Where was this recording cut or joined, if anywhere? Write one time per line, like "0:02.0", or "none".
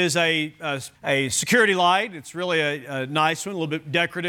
0:00.9